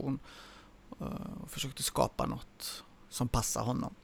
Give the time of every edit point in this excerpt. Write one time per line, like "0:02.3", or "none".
none